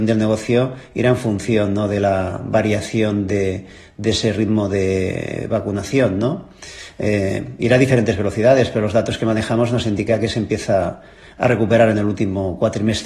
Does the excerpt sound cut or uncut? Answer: uncut